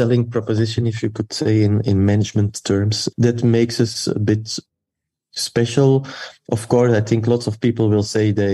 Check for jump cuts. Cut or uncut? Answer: uncut